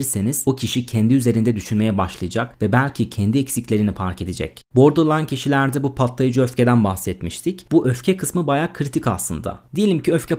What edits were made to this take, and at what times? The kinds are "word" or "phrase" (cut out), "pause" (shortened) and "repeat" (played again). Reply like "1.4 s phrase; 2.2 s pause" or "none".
4.7 s pause